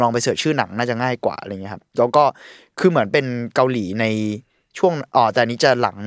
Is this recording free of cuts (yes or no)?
yes